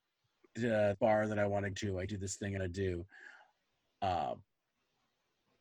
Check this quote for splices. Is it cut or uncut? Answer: cut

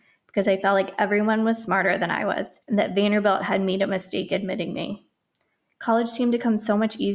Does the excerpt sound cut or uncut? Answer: cut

